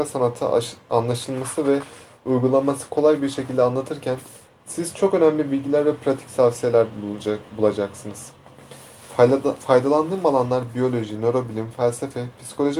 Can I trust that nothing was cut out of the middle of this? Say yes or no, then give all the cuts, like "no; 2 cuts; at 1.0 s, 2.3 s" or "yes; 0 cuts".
yes; 0 cuts